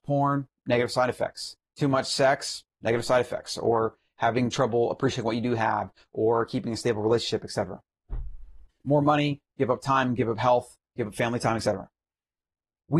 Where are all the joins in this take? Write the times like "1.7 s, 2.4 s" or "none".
8.7 s

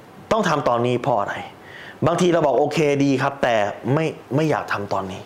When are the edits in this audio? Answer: 4.3 s

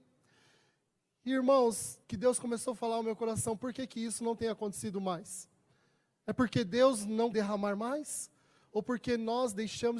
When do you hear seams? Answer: 2.0 s, 7.3 s

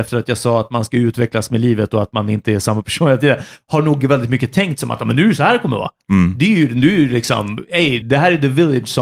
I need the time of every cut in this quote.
8.0 s

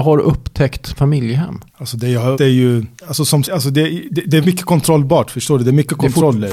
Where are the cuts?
1.0 s, 1.7 s, 2.3 s, 2.9 s, 3.4 s, 4.4 s

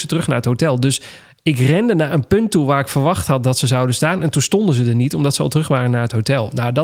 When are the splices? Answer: none

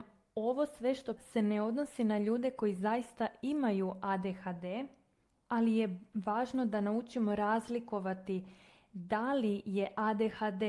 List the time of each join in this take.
1.2 s

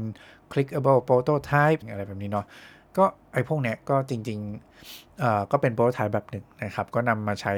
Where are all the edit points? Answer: 1.8 s

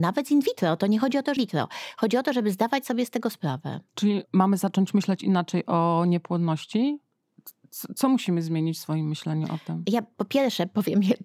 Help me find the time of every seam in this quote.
1.4 s, 3.9 s, 4.2 s

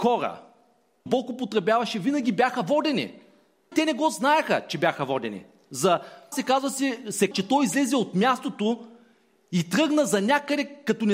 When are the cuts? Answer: 1.1 s, 3.7 s, 6.3 s, 7.3 s

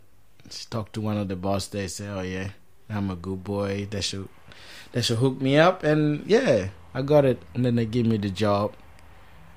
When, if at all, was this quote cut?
none

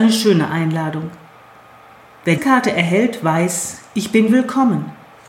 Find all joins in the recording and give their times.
2.4 s

